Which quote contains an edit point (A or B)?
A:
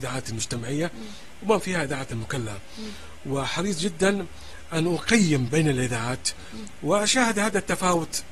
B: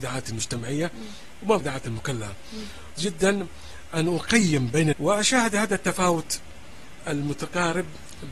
B